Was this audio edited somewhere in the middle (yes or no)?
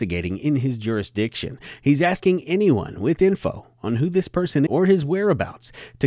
yes